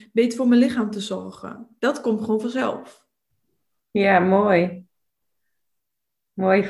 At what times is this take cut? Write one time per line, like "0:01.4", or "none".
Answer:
none

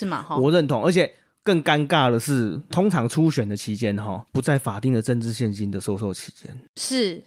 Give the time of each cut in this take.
0:02.7
0:04.3

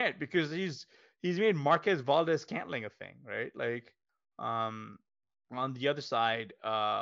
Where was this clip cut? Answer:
none

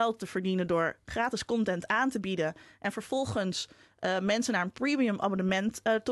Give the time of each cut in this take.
none

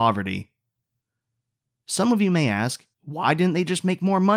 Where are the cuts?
0:02.9

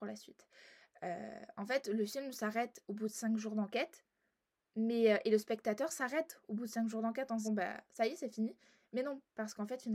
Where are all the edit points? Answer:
0:07.4

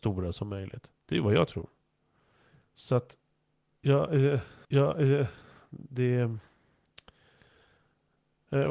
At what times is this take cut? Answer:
0:01.0
0:04.6

